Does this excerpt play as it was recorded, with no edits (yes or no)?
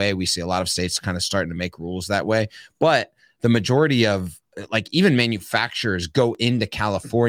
yes